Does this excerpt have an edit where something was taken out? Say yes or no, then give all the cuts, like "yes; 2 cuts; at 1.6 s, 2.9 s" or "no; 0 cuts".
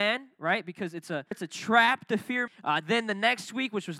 yes; 2 cuts; at 1.3 s, 2.5 s